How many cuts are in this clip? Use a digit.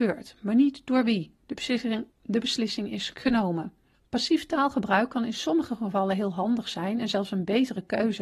2